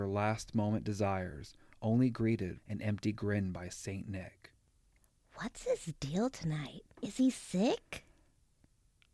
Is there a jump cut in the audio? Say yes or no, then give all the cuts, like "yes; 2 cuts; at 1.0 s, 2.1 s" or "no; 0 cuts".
yes; 2 cuts; at 2.6 s, 6.9 s